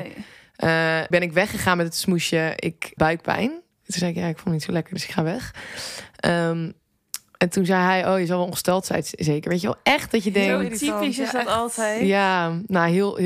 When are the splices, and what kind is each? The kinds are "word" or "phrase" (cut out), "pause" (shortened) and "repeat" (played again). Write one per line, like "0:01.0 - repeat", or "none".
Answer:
0:01.1 - word
0:03.0 - word